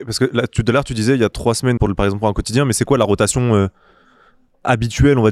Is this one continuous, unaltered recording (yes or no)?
no